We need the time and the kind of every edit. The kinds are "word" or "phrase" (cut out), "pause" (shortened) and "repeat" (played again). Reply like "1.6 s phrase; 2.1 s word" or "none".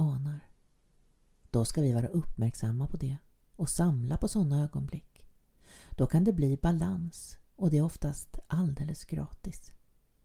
7.4 s pause